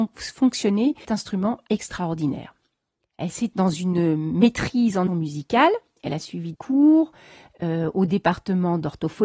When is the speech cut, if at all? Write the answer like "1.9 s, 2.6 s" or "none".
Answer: 1.0 s, 1.7 s, 3.5 s, 5.1 s, 6.5 s